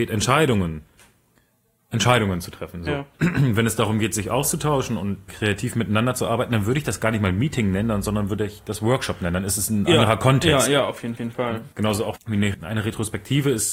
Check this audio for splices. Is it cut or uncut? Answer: cut